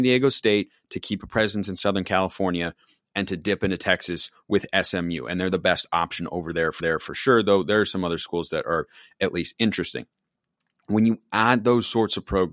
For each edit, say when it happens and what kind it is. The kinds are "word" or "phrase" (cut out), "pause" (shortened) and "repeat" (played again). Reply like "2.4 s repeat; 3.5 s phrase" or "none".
6.8 s repeat